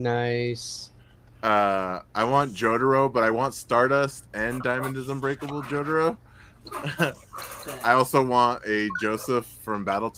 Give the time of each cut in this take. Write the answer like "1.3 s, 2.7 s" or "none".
none